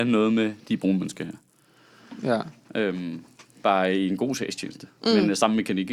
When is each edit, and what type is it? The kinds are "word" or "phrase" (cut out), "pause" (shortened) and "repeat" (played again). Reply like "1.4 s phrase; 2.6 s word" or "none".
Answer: none